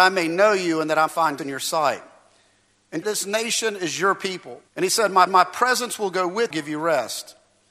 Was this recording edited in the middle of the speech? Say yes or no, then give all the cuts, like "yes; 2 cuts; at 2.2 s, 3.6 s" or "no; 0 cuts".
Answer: yes; 6 cuts; at 1.1 s, 1.4 s, 3.0 s, 4.7 s, 5.3 s, 6.5 s